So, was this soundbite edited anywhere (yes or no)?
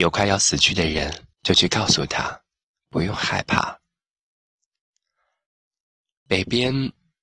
yes